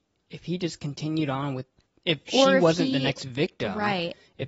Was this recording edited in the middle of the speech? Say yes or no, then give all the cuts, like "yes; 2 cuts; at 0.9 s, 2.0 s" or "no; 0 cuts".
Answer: no; 0 cuts